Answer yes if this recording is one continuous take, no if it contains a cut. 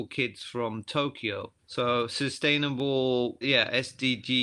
no